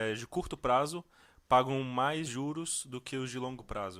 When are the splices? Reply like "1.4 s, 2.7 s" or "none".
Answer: none